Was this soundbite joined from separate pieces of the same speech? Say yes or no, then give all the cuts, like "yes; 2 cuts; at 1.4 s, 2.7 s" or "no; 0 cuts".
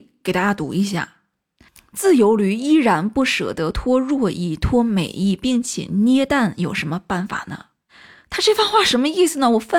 no; 0 cuts